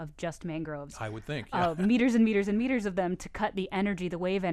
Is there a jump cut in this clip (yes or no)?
no